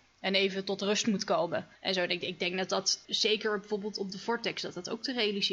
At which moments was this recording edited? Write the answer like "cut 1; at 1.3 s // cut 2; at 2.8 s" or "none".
cut 1; at 1.7 s // cut 2; at 3.0 s